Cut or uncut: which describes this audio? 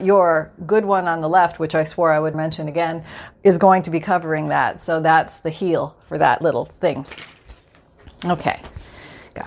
cut